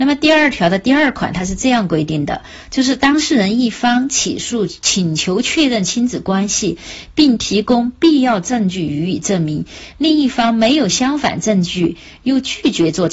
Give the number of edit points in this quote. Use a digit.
0